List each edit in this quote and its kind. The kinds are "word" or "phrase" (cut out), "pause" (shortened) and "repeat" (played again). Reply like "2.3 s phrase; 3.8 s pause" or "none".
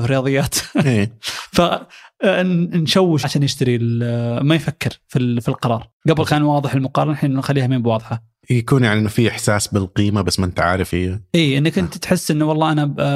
3.2 s phrase; 6.0 s pause; 8.4 s pause; 10.9 s word